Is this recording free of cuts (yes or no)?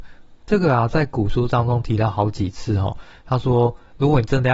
yes